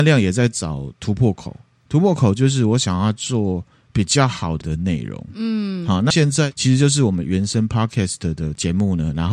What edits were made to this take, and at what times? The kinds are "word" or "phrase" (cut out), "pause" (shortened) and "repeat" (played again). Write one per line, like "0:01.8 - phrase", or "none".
0:04.6 - word
0:06.1 - word